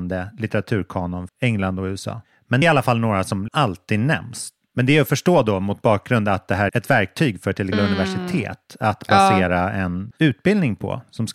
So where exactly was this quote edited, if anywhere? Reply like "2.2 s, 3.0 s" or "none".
1.3 s, 2.6 s, 3.5 s, 6.7 s, 7.7 s, 10.1 s